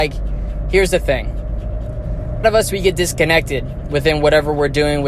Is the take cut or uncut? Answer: cut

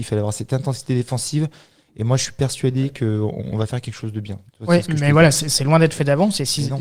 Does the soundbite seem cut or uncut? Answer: uncut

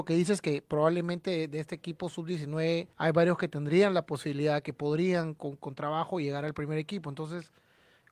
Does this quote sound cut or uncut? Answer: cut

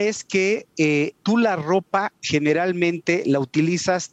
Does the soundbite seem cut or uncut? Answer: cut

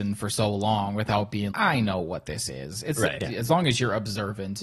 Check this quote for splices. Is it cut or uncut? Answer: cut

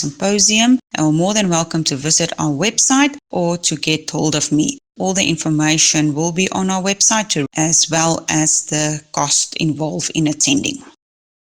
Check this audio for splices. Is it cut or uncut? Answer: cut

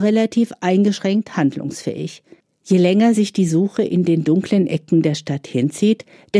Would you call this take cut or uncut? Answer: uncut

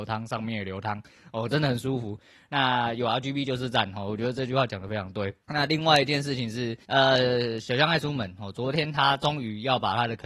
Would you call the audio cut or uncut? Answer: cut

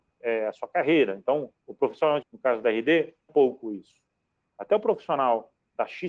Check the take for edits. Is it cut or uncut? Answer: cut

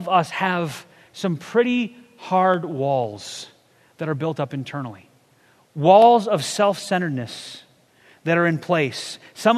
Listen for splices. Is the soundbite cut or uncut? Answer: uncut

